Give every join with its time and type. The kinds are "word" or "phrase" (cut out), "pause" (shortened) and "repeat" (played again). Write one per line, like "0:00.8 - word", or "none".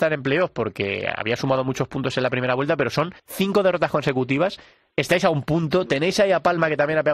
0:03.2 - pause